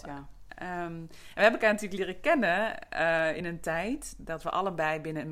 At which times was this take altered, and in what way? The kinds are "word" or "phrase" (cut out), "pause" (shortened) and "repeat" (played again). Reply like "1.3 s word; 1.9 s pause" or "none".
none

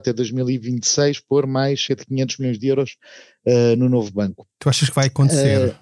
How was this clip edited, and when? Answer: 1.9 s word

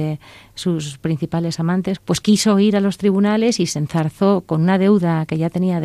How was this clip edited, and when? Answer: 2.0 s phrase

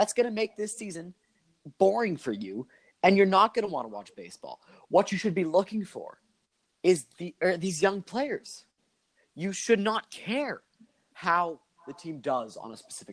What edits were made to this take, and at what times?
none

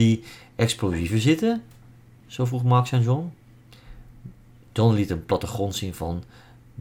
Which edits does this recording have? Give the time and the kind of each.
none

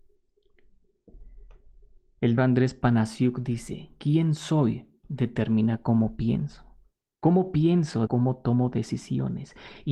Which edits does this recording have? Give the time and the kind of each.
2.4 s word; 8.1 s word

